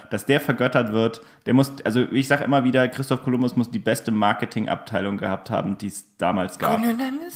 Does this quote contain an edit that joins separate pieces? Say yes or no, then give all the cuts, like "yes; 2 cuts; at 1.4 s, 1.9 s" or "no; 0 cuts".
no; 0 cuts